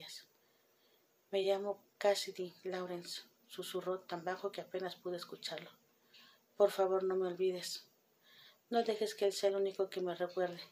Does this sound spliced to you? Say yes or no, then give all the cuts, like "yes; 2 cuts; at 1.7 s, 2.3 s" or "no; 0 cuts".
no; 0 cuts